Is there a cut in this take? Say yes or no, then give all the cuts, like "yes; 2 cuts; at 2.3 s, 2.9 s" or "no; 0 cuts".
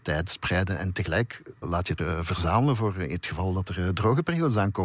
yes; 2 cuts; at 1.6 s, 2.0 s